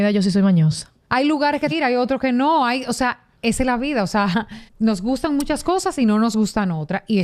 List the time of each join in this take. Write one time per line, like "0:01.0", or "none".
0:01.7
0:03.4
0:04.7

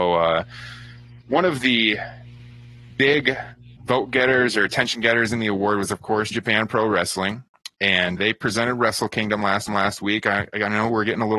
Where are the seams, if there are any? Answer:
0:03.8
0:06.3
0:08.2
0:09.7

